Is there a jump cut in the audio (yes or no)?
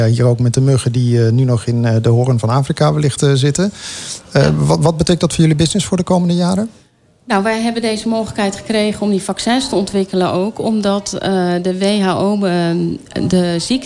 no